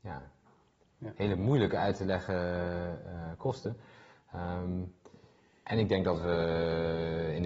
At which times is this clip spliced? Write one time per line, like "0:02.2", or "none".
none